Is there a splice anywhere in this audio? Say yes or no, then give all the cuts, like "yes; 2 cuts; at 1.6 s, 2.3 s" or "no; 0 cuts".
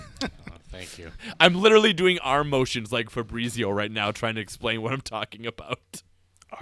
no; 0 cuts